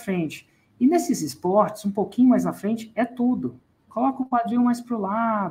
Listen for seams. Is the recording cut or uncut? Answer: uncut